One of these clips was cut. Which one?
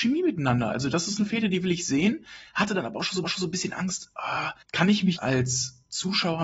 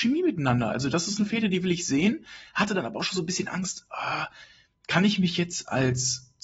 first; 3 cuts; at 3.2 s, 4.6 s, 5.2 s

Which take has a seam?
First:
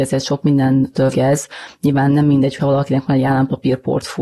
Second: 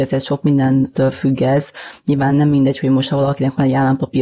first; 2 cuts; at 1.1 s, 2.6 s

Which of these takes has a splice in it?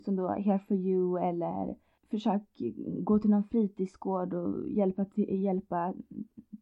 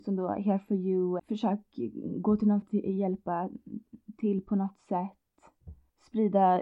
second; 2 cuts; at 1.2 s, 2.6 s

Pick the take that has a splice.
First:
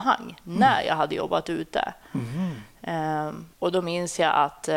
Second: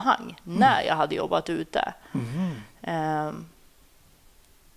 first; 1 cut; at 3.5 s

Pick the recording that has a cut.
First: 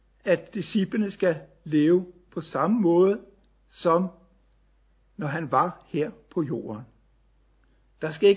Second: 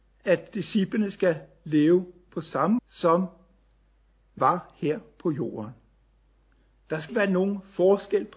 second; 3 cuts; at 2.8 s, 4.4 s, 7.1 s

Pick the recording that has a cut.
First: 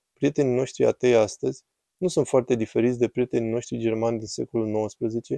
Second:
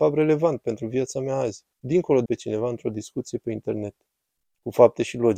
second; 2 cuts; at 1.7 s, 2.3 s

